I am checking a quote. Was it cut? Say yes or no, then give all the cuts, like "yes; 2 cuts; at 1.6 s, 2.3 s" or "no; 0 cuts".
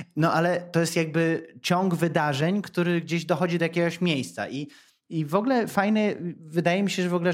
no; 0 cuts